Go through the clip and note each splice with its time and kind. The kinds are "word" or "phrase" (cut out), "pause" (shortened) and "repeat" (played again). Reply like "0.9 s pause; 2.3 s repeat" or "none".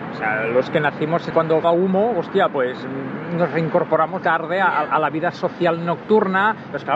1.3 s word; 1.6 s phrase; 4.2 s word